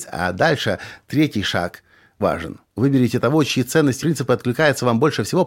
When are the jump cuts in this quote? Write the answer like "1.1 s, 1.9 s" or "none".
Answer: 2.2 s, 2.7 s, 4.0 s

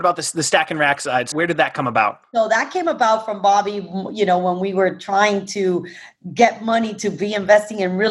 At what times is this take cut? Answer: 1.3 s

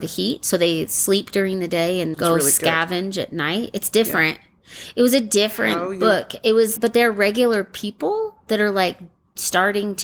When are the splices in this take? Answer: 2.1 s, 6.8 s

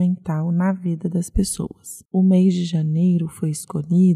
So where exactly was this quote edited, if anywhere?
2.1 s

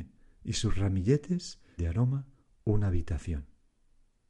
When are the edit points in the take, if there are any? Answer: 1.8 s

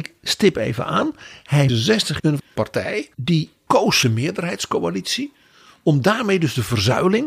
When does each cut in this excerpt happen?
1.7 s, 2.2 s, 3.1 s, 4.0 s

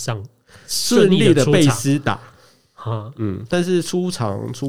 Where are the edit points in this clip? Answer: none

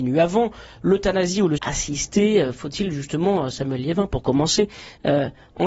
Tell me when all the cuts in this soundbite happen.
1.6 s

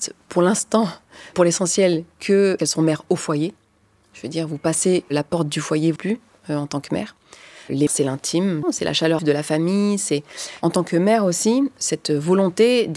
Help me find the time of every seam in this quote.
1.3 s, 2.6 s, 6.0 s, 7.9 s, 8.6 s, 9.2 s, 11.8 s

